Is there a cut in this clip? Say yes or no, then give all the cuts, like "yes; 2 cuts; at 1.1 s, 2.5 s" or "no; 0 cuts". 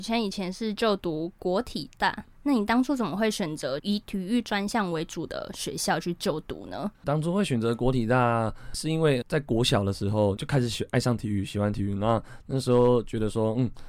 yes; 1 cut; at 6.9 s